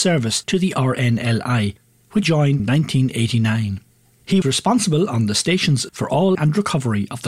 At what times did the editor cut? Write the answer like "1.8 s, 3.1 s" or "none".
2.2 s, 2.6 s, 4.4 s, 5.9 s, 6.3 s